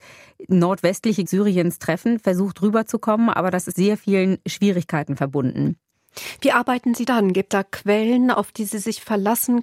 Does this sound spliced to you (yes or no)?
yes